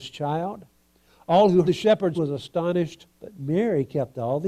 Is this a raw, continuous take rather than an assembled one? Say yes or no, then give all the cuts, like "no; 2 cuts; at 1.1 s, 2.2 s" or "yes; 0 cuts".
no; 3 cuts; at 1.6 s, 2.1 s, 3.1 s